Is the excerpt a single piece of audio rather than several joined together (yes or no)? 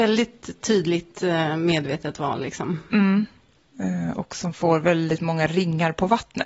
yes